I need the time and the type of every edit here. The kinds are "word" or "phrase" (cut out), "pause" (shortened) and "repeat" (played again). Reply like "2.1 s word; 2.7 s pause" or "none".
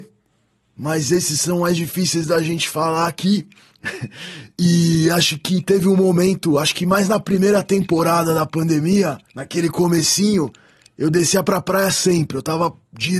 9.3 s pause